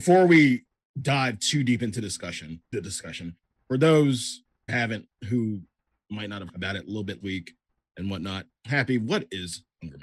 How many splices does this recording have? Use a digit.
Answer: 5